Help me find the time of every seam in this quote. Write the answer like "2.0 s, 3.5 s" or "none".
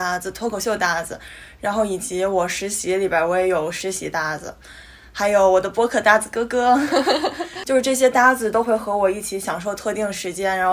none

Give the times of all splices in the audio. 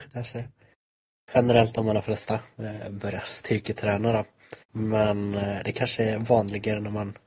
4.6 s

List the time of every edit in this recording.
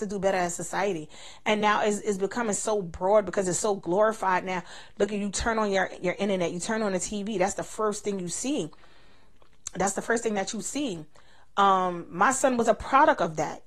none

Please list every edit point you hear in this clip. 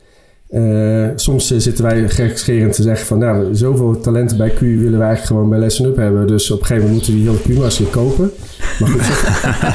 none

